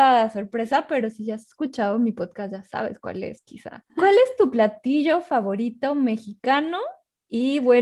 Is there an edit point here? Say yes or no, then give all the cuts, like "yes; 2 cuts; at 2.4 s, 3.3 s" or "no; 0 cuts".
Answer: yes; 1 cut; at 3.9 s